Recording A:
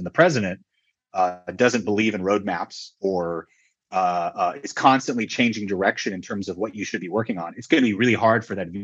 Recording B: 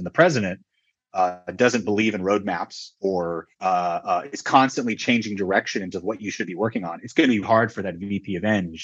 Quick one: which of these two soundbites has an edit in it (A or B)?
B